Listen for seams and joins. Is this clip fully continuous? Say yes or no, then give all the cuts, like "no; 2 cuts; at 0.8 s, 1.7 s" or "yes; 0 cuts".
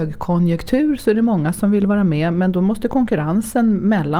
yes; 0 cuts